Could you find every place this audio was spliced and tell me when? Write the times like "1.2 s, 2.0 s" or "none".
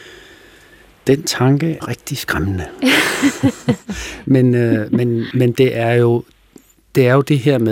1.8 s, 5.3 s